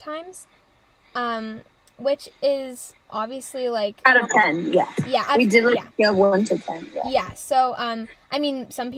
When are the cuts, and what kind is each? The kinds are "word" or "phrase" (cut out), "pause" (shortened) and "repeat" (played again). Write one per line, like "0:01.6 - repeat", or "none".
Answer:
none